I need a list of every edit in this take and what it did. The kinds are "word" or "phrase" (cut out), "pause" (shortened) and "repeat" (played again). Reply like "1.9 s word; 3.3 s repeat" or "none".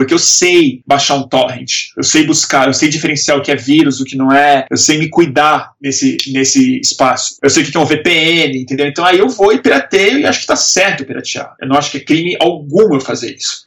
none

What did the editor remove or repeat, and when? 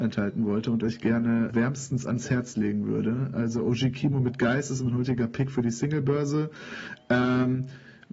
1.5 s word

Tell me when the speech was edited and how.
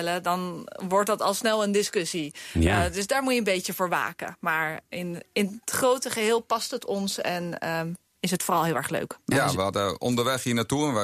9.2 s pause

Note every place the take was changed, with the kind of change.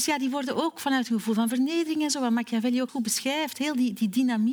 2.9 s word

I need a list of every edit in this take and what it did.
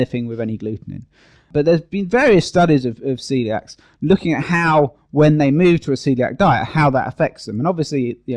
none

